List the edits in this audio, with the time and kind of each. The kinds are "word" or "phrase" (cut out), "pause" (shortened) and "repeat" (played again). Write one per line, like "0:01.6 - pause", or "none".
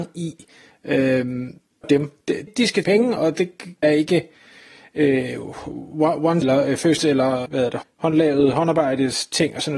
0:01.8 - word
0:02.5 - word
0:02.8 - word
0:03.2 - word
0:03.8 - word
0:06.4 - word
0:07.0 - word
0:07.5 - word
0:07.8 - word